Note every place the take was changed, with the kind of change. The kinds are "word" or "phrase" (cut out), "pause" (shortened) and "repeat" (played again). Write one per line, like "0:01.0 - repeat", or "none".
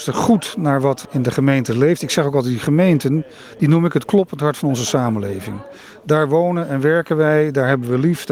none